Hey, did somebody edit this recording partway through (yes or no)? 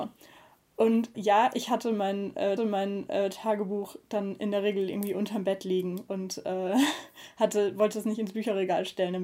yes